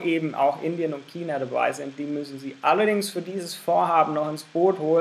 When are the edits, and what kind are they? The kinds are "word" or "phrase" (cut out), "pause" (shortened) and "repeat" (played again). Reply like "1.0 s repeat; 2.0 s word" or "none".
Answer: none